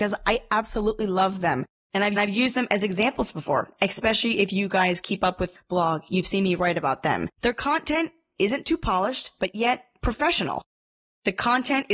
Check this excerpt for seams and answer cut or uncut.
cut